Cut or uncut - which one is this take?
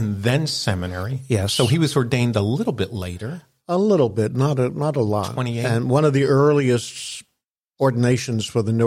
uncut